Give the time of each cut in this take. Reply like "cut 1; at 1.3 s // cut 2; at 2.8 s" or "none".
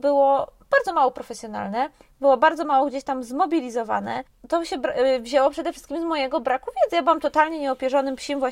none